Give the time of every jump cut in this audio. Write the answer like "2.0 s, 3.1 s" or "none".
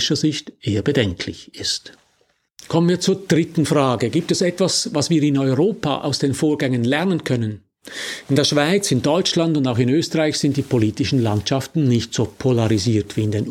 none